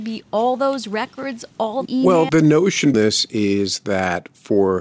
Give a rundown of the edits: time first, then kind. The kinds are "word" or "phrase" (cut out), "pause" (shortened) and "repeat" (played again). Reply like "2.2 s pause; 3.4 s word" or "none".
1.9 s word; 2.3 s word; 2.9 s word

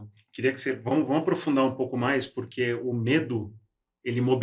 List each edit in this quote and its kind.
none

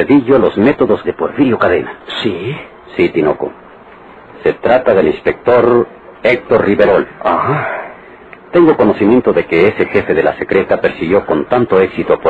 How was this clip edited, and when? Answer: 1.0 s word

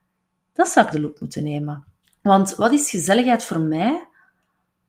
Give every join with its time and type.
0.9 s phrase; 2.0 s pause

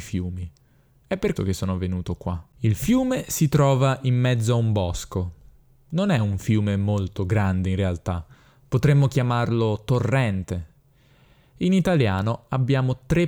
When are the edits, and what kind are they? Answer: 1.4 s word

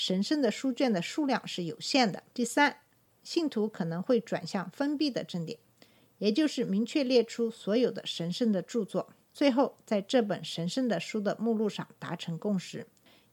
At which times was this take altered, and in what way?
2.3 s pause; 9.2 s pause

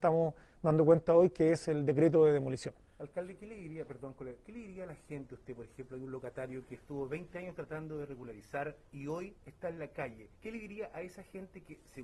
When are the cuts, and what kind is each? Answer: 9.4 s pause; 10.4 s pause

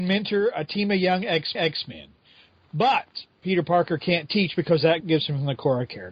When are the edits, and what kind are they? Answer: 1.5 s repeat; 5.0 s word

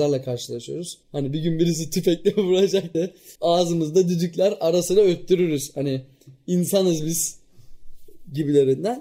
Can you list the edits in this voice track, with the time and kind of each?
1.0 s pause; 2.9 s word; 3.4 s pause

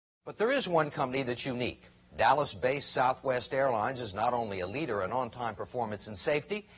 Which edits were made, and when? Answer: none

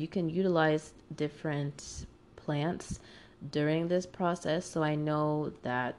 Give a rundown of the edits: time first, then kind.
1.0 s word

